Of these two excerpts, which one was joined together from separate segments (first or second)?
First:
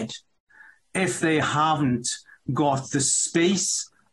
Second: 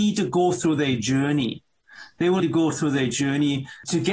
second